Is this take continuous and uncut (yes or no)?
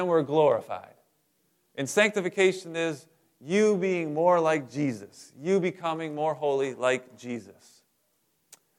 yes